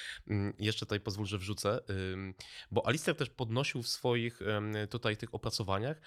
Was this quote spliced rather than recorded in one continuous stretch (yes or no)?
no